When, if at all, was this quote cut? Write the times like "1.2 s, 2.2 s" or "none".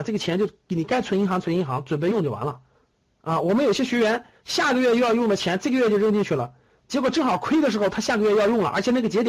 2.7 s